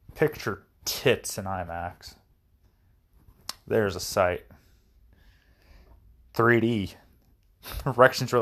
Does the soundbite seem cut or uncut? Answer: uncut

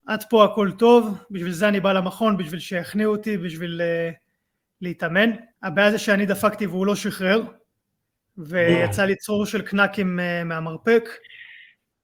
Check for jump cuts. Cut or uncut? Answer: cut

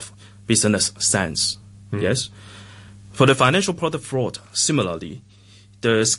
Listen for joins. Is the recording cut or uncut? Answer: uncut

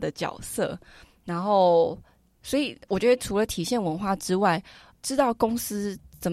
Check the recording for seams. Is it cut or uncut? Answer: uncut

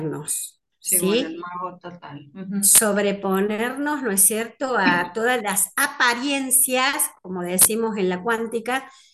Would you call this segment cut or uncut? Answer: uncut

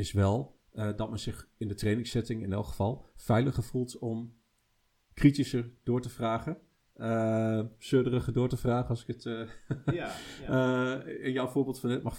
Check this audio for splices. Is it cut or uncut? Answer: uncut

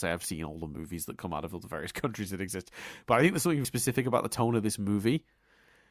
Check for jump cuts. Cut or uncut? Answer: cut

